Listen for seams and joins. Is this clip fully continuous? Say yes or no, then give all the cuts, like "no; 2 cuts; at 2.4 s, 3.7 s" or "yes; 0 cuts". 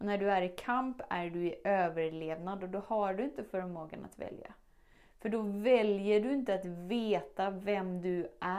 yes; 0 cuts